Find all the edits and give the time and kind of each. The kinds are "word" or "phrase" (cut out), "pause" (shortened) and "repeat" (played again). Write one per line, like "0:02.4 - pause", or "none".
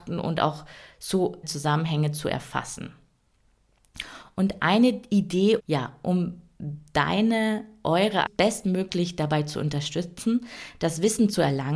0:01.4 - word
0:05.6 - word
0:08.3 - word